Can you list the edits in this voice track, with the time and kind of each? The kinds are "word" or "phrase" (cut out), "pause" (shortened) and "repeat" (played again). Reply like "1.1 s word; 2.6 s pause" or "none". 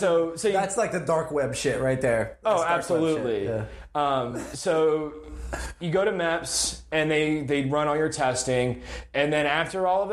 none